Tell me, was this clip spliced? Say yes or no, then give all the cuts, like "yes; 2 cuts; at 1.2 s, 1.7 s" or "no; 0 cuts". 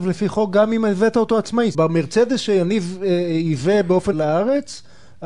yes; 2 cuts; at 1.7 s, 4.1 s